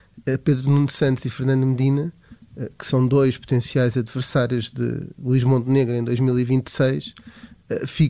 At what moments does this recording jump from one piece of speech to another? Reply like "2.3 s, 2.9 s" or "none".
none